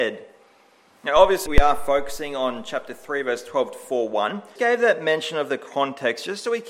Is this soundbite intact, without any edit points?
no; 2 cuts; at 1.5 s, 4.6 s

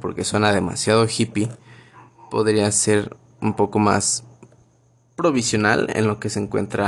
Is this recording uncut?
yes; 0 cuts

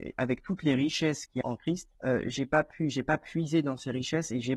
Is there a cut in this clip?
yes; 2 cuts; at 1.4 s, 1.9 s

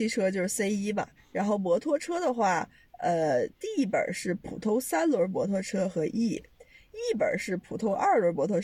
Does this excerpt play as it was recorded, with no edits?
no; 2 cuts; at 1.2 s, 3.5 s

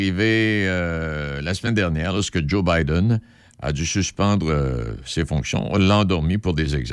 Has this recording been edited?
no; 0 cuts

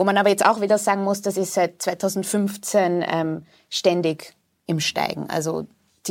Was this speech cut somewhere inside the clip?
no; 0 cuts

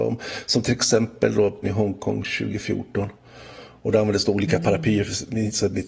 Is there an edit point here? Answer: yes; 1 cut; at 1.6 s

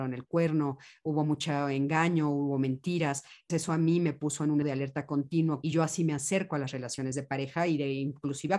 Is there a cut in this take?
yes; 3 cuts; at 3.5 s, 4.6 s, 5.6 s

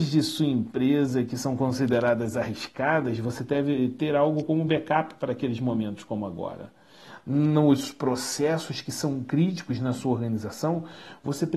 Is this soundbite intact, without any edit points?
yes; 0 cuts

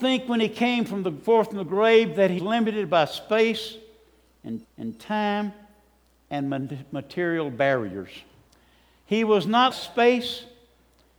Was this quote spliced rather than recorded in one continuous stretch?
yes; 4 cuts; at 2.4 s, 4.6 s, 8.5 s, 9.7 s

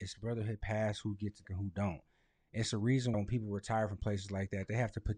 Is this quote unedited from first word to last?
no; 2 cuts; at 1.4 s, 3.1 s

